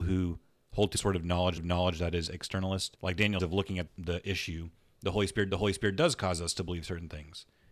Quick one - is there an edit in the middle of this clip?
yes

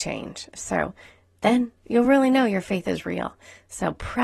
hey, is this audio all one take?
yes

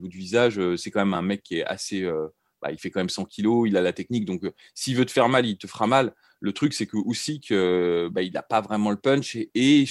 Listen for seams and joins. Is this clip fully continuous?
yes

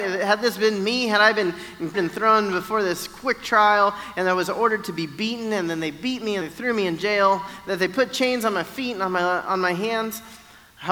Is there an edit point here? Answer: yes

